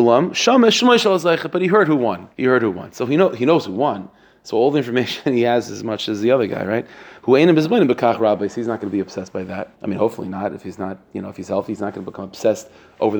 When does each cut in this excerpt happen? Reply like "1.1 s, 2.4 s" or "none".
2.3 s, 9.7 s

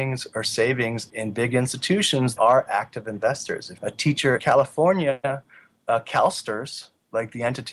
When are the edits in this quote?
1.1 s, 2.4 s, 3.8 s, 4.4 s

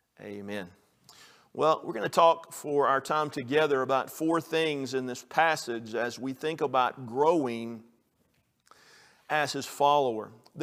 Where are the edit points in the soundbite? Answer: none

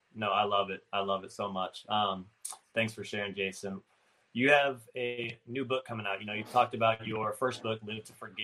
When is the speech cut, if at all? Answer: none

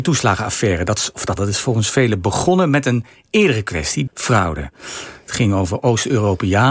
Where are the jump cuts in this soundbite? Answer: 1.4 s, 4.1 s

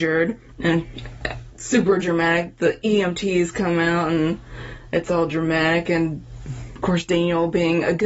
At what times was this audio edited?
none

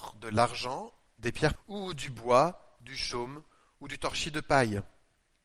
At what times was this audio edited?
1.6 s

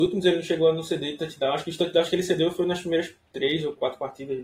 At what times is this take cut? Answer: none

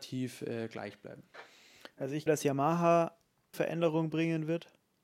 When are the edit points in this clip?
2.3 s, 3.5 s

